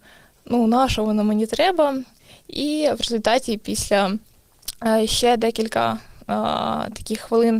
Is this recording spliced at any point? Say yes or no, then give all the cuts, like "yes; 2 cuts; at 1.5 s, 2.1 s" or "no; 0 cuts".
no; 0 cuts